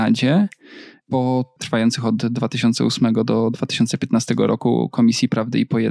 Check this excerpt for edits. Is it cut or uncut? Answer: cut